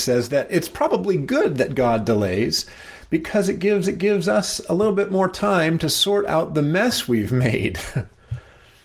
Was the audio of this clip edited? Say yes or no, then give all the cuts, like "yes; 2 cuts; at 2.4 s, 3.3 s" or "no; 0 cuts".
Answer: yes; 1 cut; at 3.8 s